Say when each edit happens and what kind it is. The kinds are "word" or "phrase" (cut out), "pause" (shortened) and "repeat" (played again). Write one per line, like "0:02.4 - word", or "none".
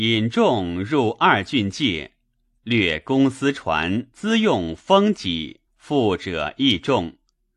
0:04.1 - pause
0:05.7 - pause